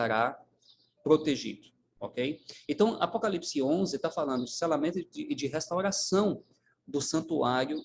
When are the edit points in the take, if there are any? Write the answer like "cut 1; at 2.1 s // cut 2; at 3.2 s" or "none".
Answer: none